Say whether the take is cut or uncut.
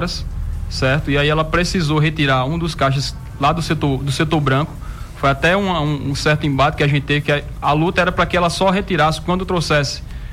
uncut